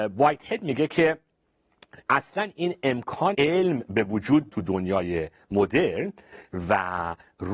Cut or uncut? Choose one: cut